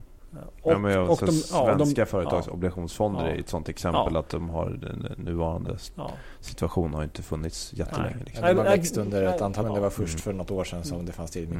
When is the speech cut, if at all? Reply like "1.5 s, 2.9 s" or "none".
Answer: 9.6 s